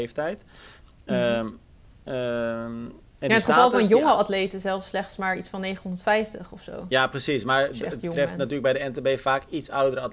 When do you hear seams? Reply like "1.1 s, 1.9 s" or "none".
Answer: none

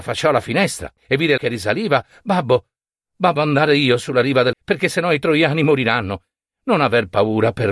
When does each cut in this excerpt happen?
1.0 s, 1.4 s, 3.4 s, 4.5 s

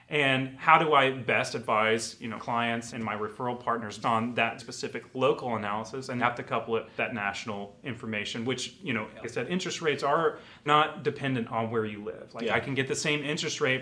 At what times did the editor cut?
2.4 s, 2.9 s, 4.0 s, 4.6 s, 6.2 s, 7.0 s, 9.2 s, 10.7 s

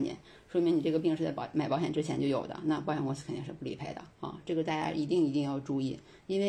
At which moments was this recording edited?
4.1 s

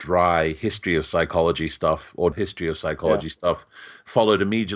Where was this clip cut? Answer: 2.3 s

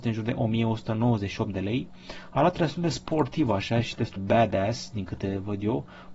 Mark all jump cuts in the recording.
4.2 s

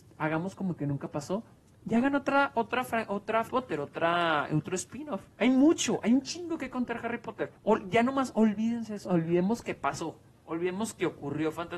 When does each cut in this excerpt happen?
3.5 s, 5.3 s, 7.6 s, 9.0 s

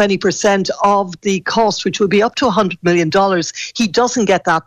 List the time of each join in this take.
none

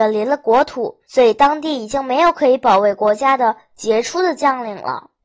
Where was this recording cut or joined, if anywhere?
1.0 s

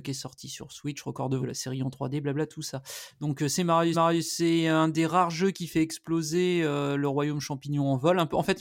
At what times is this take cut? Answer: 1.4 s, 3.9 s

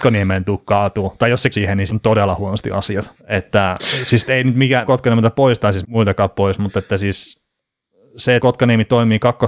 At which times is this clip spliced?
1.5 s, 1.9 s, 3.2 s, 4.9 s, 5.8 s, 8.4 s

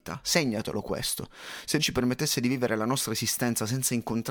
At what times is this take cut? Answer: 1.8 s

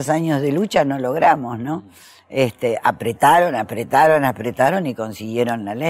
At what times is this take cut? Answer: none

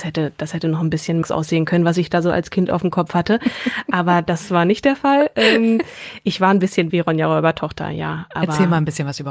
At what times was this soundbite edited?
1.2 s, 6.9 s

